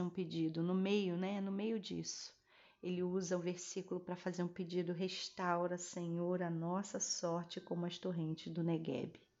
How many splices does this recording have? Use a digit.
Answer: 0